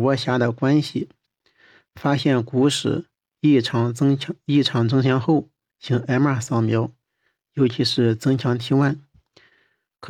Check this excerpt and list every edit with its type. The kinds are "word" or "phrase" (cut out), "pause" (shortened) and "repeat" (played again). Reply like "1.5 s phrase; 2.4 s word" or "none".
none